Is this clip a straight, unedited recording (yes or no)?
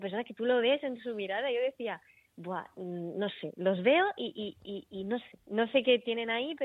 yes